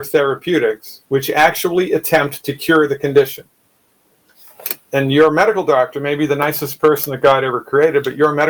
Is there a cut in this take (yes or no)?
yes